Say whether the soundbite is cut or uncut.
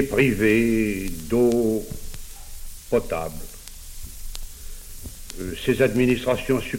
uncut